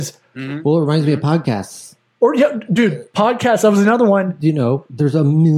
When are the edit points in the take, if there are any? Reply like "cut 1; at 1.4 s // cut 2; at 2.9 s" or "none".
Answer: none